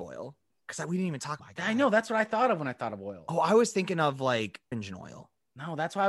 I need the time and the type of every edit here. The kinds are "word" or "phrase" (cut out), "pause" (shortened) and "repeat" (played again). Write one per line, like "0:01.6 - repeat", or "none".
0:01.4 - phrase
0:04.7 - word